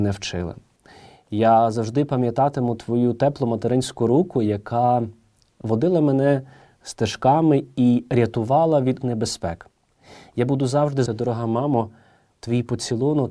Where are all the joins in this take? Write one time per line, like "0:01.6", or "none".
0:09.0
0:11.1